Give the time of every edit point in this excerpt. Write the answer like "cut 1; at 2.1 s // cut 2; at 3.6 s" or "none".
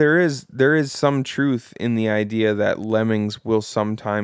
none